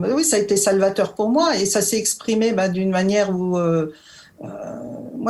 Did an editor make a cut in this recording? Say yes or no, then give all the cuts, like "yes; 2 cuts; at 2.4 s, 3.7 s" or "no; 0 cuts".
no; 0 cuts